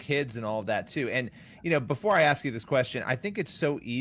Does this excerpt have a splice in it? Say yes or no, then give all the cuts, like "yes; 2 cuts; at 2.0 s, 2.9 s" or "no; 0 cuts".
no; 0 cuts